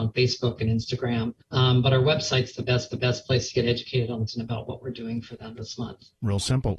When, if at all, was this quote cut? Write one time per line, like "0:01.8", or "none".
0:01.4
0:02.9
0:04.3